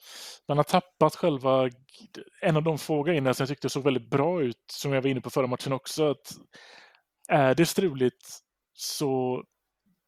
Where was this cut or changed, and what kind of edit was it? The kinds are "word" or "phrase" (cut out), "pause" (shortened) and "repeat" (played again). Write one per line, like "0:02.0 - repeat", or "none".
none

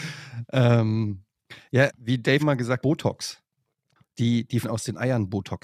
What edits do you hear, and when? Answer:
0:01.9 - word
0:02.4 - word
0:02.8 - word
0:04.6 - word

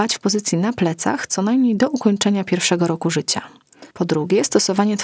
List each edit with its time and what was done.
0:03.9 - pause

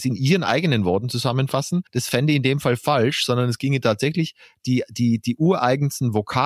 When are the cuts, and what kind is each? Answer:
0:01.9 - pause

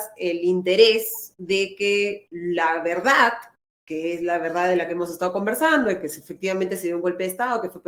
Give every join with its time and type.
none

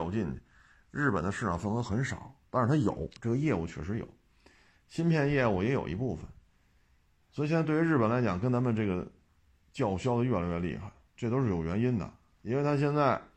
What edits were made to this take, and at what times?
0:11.2 - word

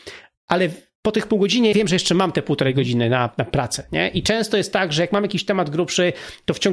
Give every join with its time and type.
0:01.7 - word

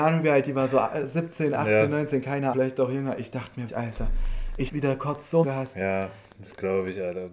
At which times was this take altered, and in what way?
0:02.5 - word
0:03.7 - word
0:04.7 - word
0:05.4 - word

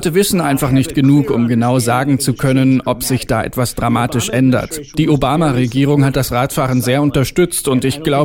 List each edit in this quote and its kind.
none

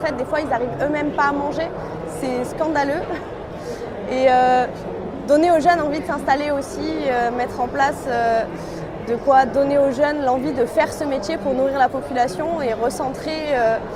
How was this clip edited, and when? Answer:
none

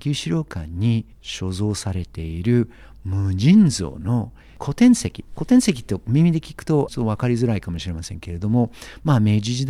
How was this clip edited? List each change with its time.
0:01.1 - pause
0:06.9 - phrase

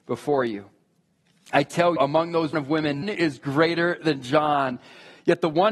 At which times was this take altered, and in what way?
0:02.0 - word
0:02.5 - word
0:03.0 - word

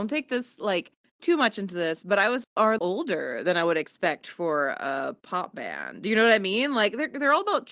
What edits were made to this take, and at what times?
0:01.2 - phrase
0:02.4 - phrase
0:02.8 - phrase

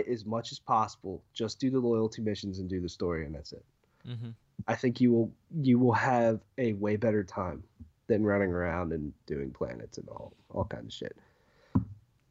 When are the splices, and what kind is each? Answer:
none

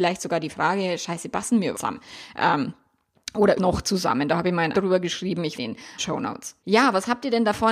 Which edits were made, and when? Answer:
0:01.7 - word
0:03.5 - word
0:04.7 - word
0:05.5 - word
0:06.0 - phrase
0:06.6 - pause

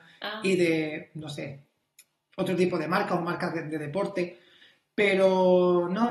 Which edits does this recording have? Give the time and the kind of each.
none

